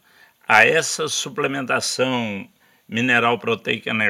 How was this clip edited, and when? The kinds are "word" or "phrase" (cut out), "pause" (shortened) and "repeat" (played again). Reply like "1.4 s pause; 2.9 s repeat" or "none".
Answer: none